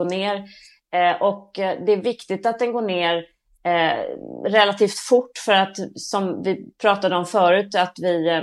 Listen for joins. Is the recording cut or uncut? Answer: uncut